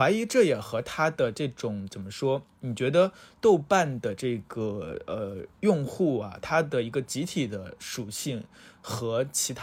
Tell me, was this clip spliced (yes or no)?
yes